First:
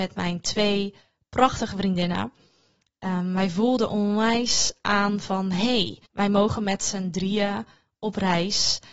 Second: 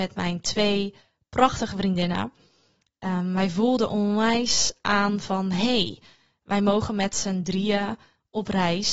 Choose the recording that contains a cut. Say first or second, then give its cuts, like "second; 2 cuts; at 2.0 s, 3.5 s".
first; 1 cut; at 6.1 s